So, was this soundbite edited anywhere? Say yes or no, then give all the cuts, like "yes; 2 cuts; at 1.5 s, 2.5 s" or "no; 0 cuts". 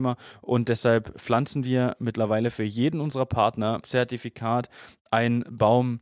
yes; 1 cut; at 3.8 s